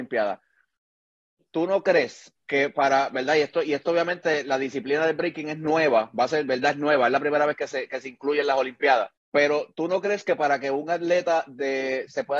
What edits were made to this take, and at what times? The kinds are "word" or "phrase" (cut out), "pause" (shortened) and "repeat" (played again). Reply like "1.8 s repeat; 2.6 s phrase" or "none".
9.2 s pause